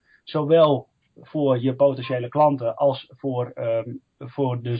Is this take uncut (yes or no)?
yes